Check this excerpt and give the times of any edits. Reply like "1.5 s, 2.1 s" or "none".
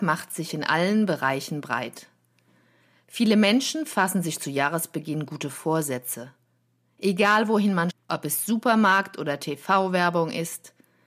7.9 s